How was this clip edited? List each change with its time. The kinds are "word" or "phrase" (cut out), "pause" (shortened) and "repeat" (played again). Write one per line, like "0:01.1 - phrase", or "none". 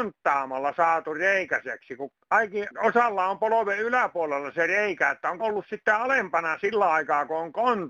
0:02.7 - word
0:05.4 - word